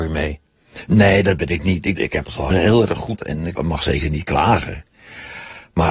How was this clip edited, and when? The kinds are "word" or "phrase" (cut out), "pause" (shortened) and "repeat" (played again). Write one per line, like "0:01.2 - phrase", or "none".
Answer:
0:02.0 - word
0:02.5 - word
0:03.2 - word
0:03.6 - word

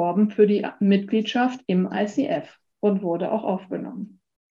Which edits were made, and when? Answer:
0:01.6 - pause

